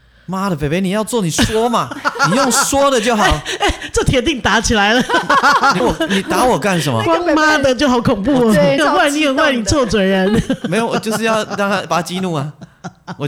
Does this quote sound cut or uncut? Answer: cut